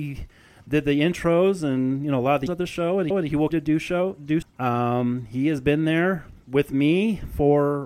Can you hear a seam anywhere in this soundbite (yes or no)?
yes